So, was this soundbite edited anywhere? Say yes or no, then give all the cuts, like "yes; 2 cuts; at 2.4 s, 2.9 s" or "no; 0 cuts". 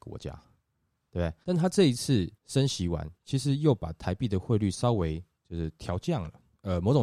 yes; 3 cuts; at 1.4 s, 2.4 s, 3.2 s